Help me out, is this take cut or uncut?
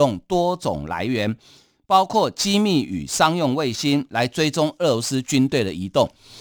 uncut